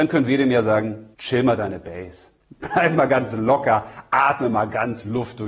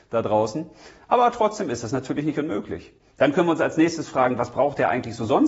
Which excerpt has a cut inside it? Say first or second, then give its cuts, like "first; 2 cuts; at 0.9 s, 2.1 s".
first; 1 cut; at 1.1 s